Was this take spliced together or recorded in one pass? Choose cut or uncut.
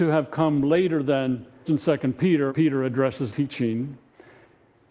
cut